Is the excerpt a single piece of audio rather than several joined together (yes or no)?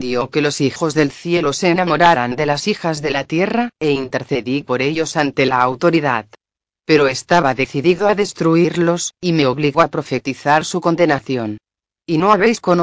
yes